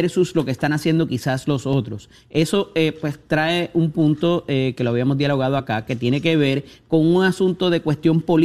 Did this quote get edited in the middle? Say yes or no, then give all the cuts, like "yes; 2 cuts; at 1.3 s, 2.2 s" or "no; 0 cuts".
no; 0 cuts